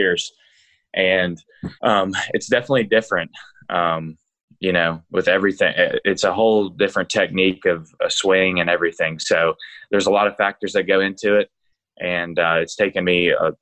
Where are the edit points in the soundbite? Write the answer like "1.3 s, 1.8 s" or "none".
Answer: 1.8 s